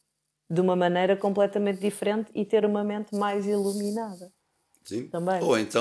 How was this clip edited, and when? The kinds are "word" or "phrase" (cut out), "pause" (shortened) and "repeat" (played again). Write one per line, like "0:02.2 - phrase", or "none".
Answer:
none